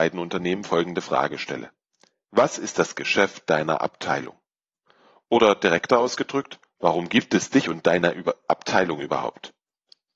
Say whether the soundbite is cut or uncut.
uncut